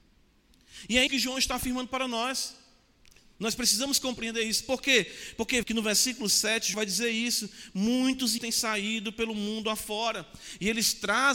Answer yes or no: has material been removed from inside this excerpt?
yes